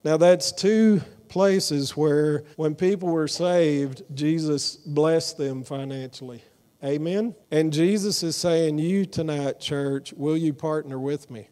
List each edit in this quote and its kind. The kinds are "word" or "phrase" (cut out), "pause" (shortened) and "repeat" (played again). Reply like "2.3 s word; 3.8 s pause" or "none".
2.5 s pause; 7.4 s pause

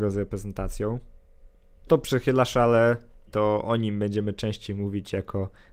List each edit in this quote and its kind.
1.9 s word; 3.3 s phrase

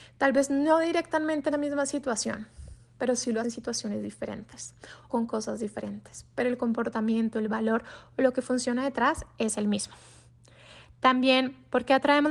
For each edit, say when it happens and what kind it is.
1.5 s word; 3.4 s word; 5.1 s word

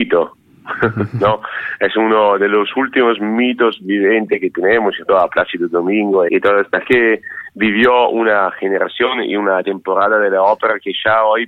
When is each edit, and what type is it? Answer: 5.1 s word; 6.3 s word; 6.8 s word

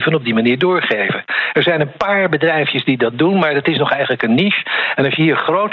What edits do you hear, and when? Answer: none

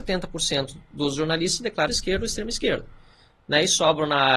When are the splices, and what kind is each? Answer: 1.9 s word

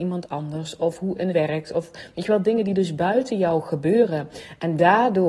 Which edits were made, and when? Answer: 1.3 s word

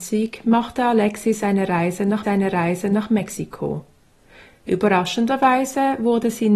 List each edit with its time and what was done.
2.2 s repeat

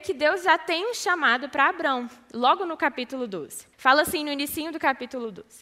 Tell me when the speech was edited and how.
3.7 s pause

